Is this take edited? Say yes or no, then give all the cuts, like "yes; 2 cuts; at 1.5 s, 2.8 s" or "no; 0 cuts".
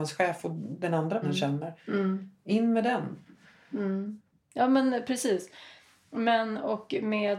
yes; 1 cut; at 1.2 s